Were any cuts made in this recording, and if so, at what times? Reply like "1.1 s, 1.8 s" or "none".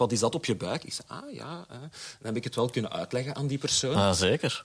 none